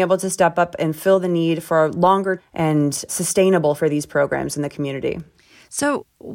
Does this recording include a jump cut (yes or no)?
yes